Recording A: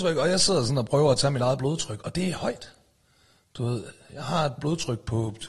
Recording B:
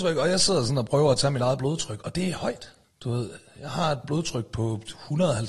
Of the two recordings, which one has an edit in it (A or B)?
B